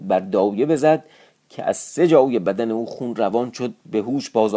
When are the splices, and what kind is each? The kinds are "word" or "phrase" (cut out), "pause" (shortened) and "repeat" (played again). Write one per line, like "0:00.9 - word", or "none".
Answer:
none